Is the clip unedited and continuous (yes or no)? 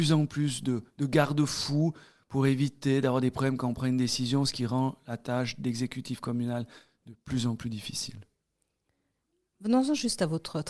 yes